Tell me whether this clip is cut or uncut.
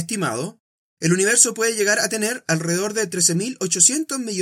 uncut